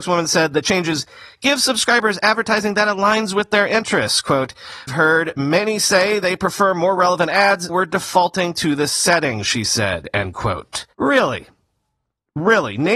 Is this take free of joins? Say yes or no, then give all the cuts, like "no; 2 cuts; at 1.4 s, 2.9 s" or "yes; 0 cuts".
no; 3 cuts; at 4.9 s, 7.7 s, 10.9 s